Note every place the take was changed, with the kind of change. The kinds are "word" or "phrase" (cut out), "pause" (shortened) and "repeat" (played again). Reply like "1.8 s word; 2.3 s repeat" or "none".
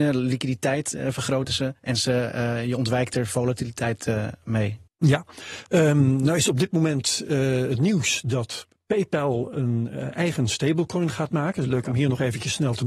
4.9 s pause